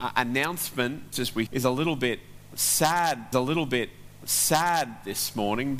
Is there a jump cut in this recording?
yes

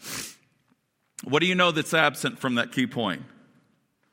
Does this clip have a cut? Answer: no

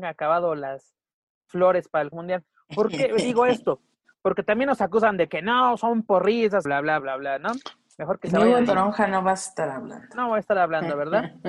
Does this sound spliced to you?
yes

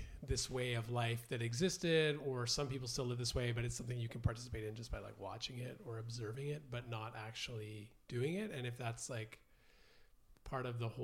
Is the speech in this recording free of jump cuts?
no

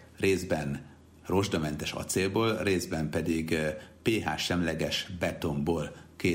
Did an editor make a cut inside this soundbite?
no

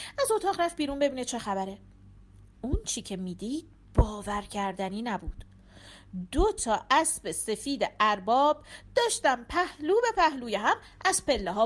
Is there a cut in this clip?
no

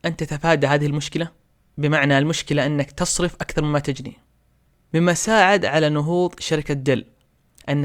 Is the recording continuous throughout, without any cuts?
yes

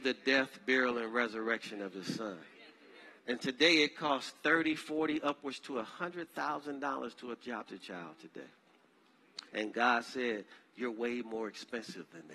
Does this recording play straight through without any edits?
no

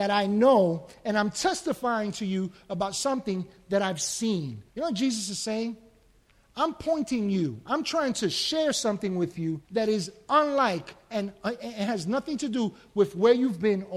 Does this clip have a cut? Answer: yes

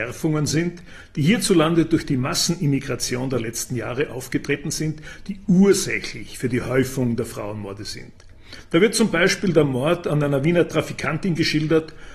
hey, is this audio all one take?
yes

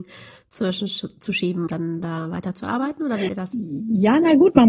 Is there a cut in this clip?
yes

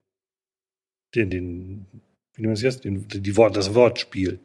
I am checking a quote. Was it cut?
yes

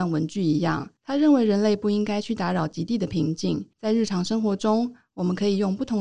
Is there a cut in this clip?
yes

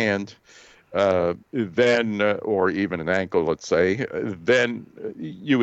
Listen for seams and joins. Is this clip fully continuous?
no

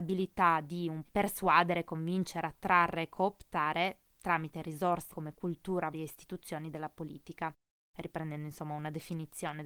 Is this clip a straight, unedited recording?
no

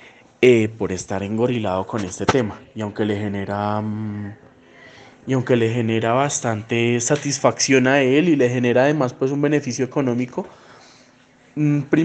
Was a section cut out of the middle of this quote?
no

